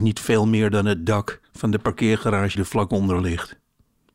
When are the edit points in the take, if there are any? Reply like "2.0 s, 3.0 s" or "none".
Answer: 2.6 s

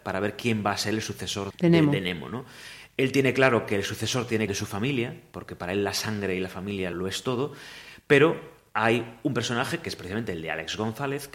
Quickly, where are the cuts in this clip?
1.5 s, 4.5 s, 6.9 s

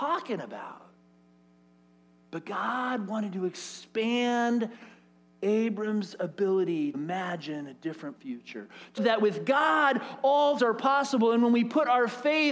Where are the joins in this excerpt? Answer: 6.9 s, 8.2 s, 9.0 s, 10.6 s

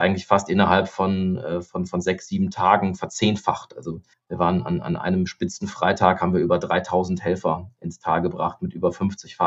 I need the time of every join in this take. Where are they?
4.1 s

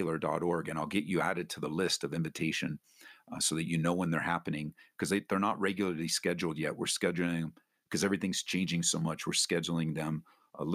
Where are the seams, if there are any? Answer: none

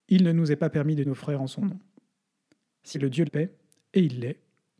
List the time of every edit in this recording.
1.0 s, 2.9 s, 3.3 s

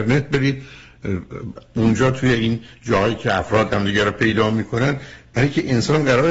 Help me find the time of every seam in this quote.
none

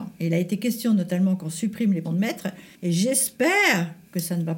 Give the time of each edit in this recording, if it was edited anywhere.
2.0 s, 2.7 s

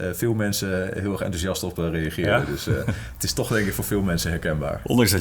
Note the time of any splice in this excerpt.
none

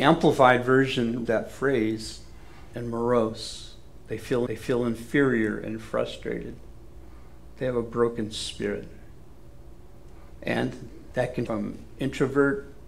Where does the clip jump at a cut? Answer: 1.3 s, 2.7 s, 4.5 s, 11.5 s

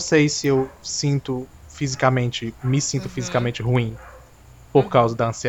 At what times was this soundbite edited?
none

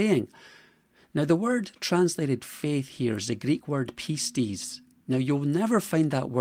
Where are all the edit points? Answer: none

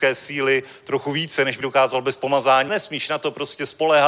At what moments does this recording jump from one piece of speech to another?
1.6 s, 2.7 s

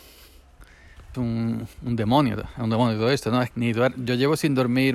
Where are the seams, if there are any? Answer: 1.1 s, 1.7 s, 3.5 s

